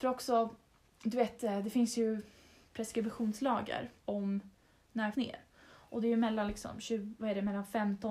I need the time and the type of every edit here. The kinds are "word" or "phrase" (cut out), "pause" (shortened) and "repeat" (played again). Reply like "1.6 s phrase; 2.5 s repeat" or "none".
4.0 s pause; 5.1 s phrase